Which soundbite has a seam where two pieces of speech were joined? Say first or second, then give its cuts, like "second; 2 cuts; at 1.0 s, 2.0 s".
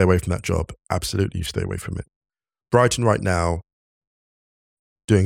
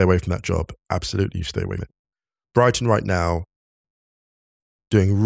second; 1 cut; at 1.8 s